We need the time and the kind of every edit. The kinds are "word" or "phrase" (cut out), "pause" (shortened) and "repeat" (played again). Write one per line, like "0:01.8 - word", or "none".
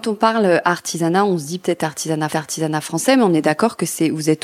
0:02.3 - repeat